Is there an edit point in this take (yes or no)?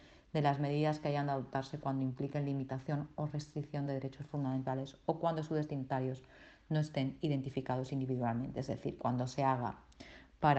no